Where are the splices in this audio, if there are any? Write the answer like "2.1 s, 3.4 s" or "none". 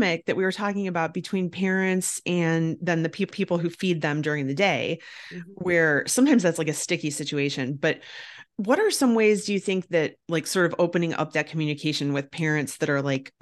3.3 s, 8.5 s, 10.2 s